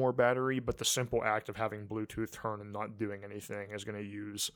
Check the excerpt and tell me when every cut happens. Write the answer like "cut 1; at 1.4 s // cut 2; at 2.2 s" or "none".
cut 1; at 2.6 s